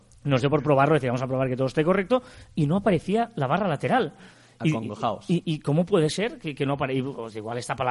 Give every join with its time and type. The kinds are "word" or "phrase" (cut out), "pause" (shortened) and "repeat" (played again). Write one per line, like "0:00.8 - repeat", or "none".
none

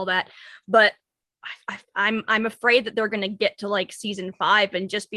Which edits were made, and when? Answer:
none

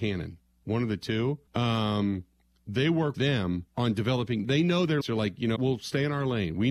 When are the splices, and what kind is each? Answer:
0:01.5 - pause
0:03.1 - word
0:03.7 - pause
0:04.4 - word
0:05.0 - word
0:05.6 - word

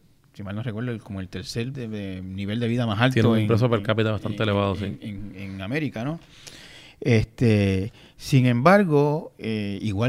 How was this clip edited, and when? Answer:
0:01.7 - word
0:05.3 - word

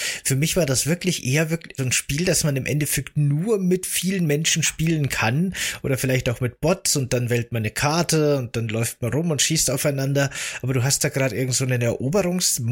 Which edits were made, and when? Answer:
0:01.8 - word

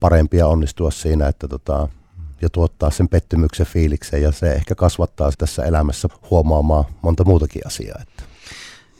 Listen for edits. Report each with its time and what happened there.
0:05.3 - word
0:06.1 - word

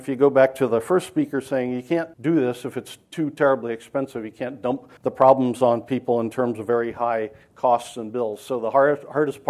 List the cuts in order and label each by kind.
0:02.1 - pause
0:05.0 - pause

